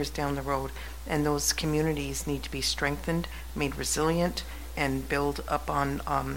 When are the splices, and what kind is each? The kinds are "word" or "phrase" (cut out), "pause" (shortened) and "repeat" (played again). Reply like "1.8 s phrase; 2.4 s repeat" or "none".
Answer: 4.8 s word